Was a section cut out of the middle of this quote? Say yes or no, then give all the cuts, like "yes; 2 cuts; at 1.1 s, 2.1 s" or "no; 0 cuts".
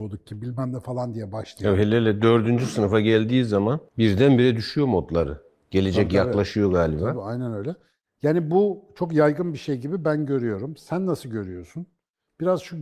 no; 0 cuts